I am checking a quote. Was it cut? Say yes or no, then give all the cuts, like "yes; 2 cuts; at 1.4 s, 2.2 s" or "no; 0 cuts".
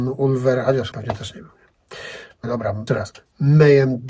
yes; 3 cuts; at 0.9 s, 2.4 s, 2.9 s